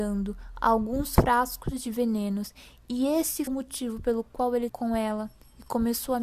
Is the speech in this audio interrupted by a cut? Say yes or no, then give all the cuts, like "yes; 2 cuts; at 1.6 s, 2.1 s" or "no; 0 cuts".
yes; 2 cuts; at 3.5 s, 4.7 s